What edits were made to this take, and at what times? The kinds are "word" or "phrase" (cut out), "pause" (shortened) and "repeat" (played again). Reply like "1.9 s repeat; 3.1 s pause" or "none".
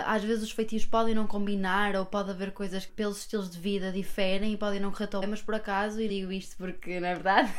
2.9 s word; 5.2 s word; 6.1 s word

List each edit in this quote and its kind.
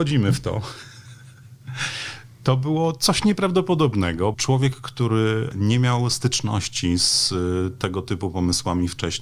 4.3 s word

